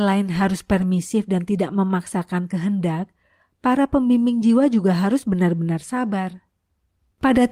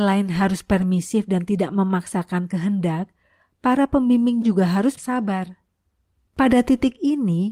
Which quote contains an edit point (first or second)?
second